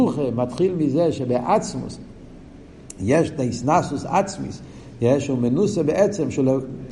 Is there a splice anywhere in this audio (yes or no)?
no